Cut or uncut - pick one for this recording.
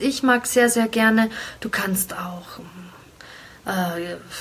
uncut